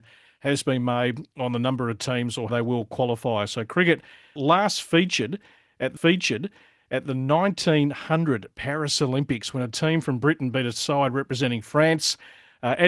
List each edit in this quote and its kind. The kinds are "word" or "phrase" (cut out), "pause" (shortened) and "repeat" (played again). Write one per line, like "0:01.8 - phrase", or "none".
0:02.5 - word
0:04.4 - word
0:06.0 - repeat